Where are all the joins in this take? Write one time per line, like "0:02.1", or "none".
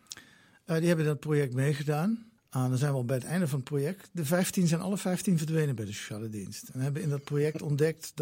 0:02.4